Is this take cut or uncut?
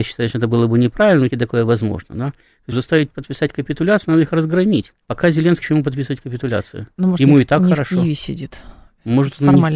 cut